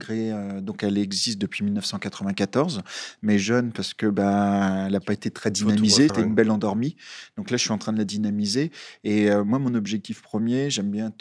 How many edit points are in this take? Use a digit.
1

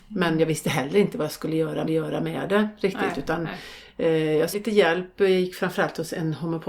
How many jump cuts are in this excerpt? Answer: 2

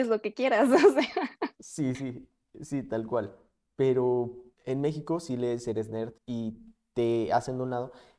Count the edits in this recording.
3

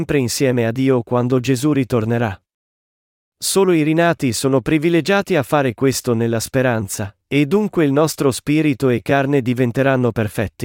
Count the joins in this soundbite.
0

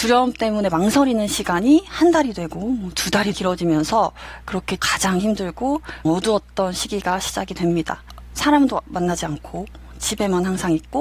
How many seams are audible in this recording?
3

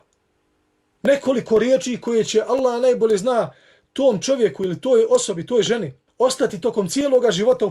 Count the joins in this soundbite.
1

